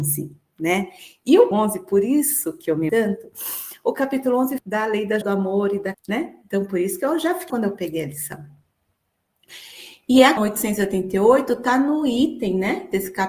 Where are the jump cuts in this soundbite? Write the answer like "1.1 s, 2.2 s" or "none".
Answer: 1.5 s, 2.9 s, 4.6 s, 5.2 s, 5.9 s, 7.5 s, 10.4 s